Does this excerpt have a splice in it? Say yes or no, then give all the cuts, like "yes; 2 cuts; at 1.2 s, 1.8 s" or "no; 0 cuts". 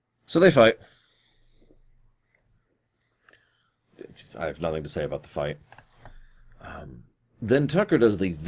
yes; 1 cut; at 7.2 s